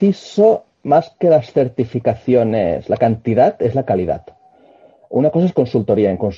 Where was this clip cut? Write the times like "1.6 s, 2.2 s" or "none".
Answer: none